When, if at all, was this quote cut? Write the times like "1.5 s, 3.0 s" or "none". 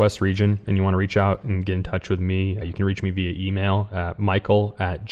2.6 s